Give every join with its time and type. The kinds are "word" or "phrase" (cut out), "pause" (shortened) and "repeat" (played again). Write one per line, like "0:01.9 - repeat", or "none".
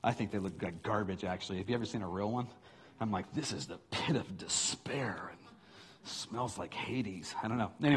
none